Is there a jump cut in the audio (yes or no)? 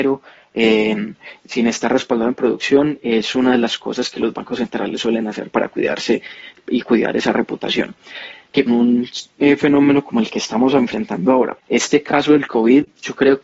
yes